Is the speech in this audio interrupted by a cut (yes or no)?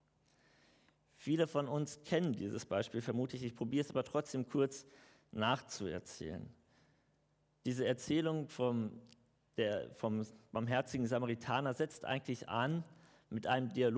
no